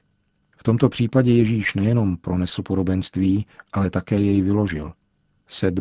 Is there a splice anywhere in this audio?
no; 0 cuts

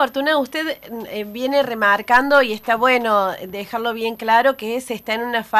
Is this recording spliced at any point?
no; 0 cuts

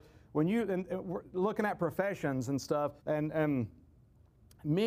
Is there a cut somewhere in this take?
yes; 1 cut; at 3.0 s

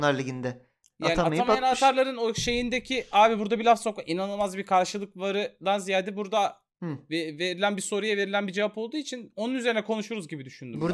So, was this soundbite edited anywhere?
no; 0 cuts

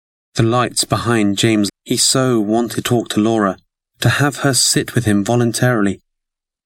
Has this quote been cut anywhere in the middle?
yes; 3 cuts; at 1.7 s, 2.8 s, 3.7 s

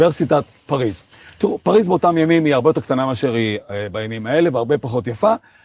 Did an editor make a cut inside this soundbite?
no; 0 cuts

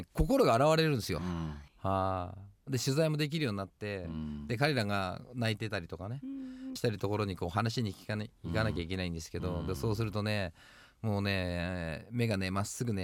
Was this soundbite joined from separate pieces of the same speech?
yes; 2 cuts; at 1.7 s, 6.8 s

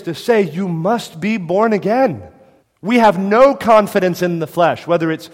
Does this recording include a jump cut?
yes; 1 cut; at 2.6 s

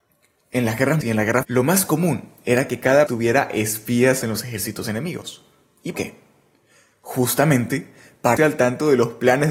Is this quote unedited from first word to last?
no; 6 cuts; at 1.0 s, 1.4 s, 3.1 s, 4.2 s, 5.9 s, 8.4 s

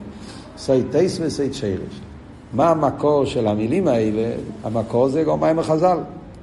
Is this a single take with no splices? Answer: yes; 0 cuts

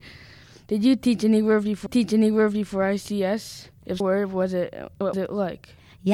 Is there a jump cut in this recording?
yes; 3 cuts; at 1.9 s, 4.0 s, 5.1 s

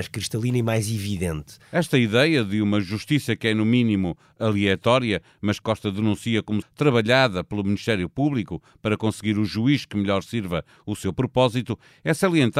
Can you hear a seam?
yes; 2 cuts; at 5.6 s, 6.6 s

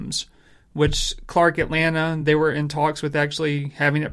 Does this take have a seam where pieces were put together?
no; 0 cuts

